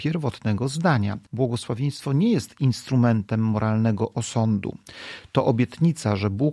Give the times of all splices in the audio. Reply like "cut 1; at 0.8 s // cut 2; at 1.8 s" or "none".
cut 1; at 1.2 s